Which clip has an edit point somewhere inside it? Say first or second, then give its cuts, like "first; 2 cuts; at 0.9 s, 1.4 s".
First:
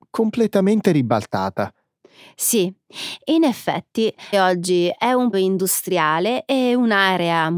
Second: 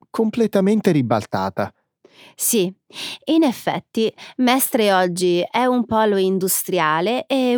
first; 2 cuts; at 4.3 s, 5.3 s